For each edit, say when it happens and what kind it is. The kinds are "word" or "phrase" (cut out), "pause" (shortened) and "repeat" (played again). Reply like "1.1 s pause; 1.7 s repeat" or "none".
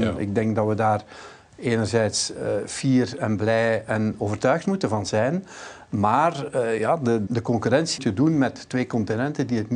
7.3 s word; 8.0 s word